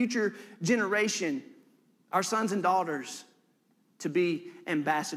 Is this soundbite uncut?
yes; 0 cuts

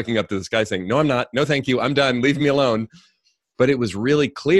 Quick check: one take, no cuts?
yes; 0 cuts

